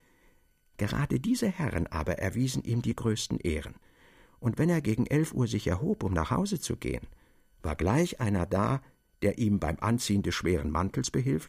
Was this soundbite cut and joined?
no; 0 cuts

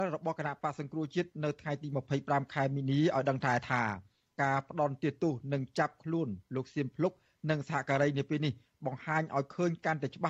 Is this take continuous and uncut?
yes; 0 cuts

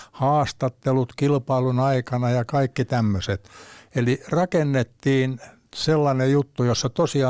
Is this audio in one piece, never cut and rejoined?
yes; 0 cuts

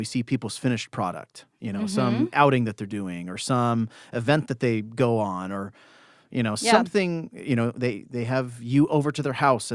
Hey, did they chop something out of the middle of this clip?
no; 0 cuts

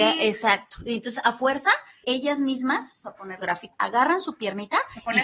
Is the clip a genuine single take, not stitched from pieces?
no; 4 cuts; at 2.0 s, 3.0 s, 3.4 s, 3.7 s

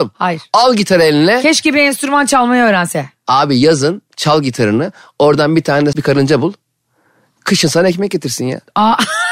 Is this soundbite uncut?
no; 1 cut; at 5.9 s

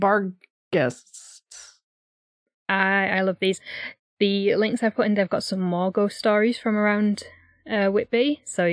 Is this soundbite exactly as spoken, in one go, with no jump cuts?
yes; 0 cuts

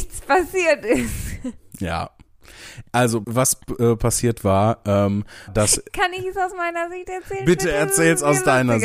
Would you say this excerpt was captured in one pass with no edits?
no; 2 cuts; at 3.2 s, 5.5 s

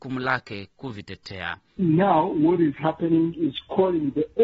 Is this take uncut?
yes; 0 cuts

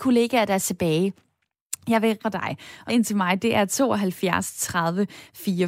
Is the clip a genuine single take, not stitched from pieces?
no; 2 cuts; at 2.2 s, 2.9 s

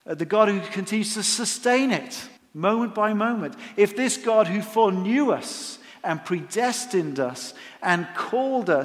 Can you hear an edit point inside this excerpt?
yes; 1 cut; at 2.4 s

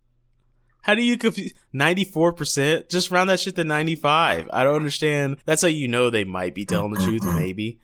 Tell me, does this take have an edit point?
yes; 1 cut; at 5.4 s

